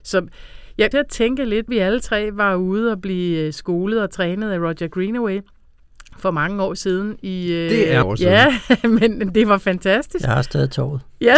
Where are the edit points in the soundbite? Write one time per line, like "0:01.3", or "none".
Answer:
0:00.9
0:01.7
0:08.0